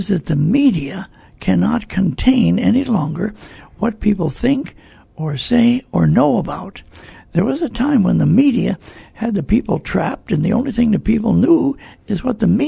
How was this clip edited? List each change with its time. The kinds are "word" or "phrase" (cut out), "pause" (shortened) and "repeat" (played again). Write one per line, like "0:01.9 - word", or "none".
none